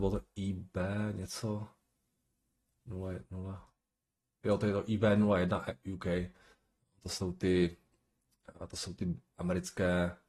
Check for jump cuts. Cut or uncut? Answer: uncut